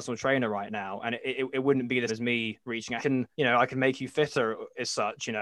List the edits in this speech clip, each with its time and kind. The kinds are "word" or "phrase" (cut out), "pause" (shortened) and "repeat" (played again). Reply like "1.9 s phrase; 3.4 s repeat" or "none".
2.1 s word; 2.6 s pause; 3.0 s phrase; 3.3 s pause